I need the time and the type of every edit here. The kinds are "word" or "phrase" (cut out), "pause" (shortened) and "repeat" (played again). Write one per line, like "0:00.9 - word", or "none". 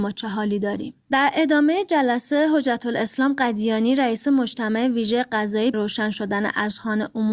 0:01.0 - pause
0:05.7 - word